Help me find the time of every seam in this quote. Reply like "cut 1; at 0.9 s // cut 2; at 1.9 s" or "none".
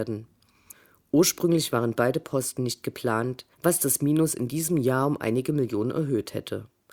cut 1; at 3.5 s